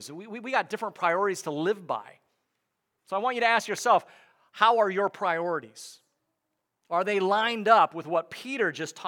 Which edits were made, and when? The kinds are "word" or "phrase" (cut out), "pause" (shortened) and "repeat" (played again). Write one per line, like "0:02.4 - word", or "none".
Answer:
none